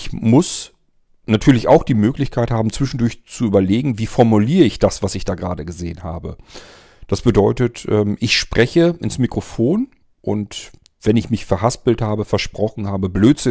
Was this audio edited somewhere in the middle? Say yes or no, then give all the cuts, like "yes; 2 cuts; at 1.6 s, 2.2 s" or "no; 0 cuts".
no; 0 cuts